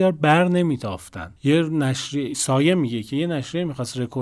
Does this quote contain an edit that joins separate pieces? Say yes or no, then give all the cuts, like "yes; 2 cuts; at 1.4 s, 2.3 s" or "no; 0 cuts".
no; 0 cuts